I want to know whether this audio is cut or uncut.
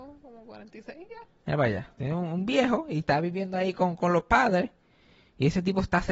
uncut